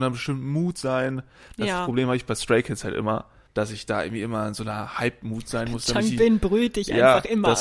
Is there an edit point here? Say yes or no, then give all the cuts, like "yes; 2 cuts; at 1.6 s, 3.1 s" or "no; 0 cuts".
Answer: yes; 1 cut; at 3.5 s